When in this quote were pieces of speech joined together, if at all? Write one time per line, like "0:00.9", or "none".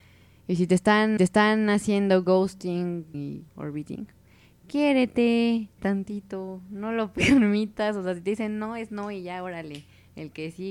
0:01.2
0:03.1
0:03.5
0:05.8